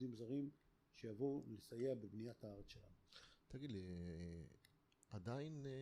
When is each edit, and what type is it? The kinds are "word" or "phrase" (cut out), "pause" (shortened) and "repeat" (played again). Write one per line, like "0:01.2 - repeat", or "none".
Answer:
none

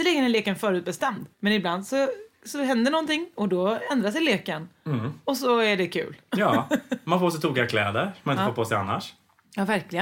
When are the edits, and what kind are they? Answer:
0:01.3 - pause

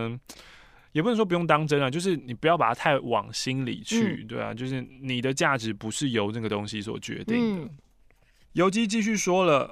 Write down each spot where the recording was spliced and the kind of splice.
none

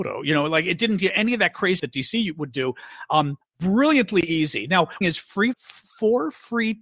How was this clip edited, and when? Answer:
0:01.8 - word
0:03.4 - pause
0:05.0 - phrase
0:05.5 - word

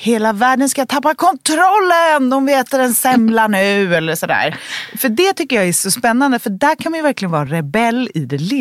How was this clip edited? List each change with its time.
none

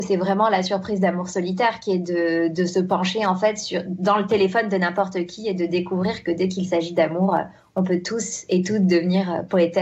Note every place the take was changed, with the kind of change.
none

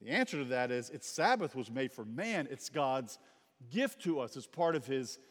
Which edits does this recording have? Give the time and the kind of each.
none

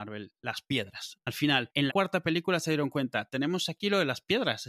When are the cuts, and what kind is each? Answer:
0:01.9 - phrase

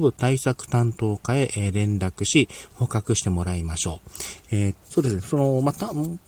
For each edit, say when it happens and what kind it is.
0:04.8 - word

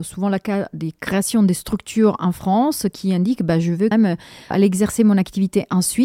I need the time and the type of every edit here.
0:03.9 - word
0:04.5 - word

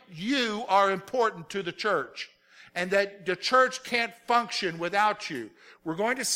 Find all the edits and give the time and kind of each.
none

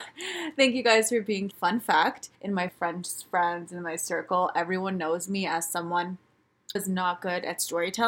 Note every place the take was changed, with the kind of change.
0:01.5 - phrase
0:02.3 - pause
0:02.7 - phrase
0:06.8 - word

